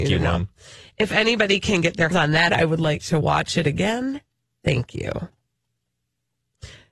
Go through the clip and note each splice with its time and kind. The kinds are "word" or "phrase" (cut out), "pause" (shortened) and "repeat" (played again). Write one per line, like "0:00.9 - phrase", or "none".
0:02.1 - word
0:02.5 - word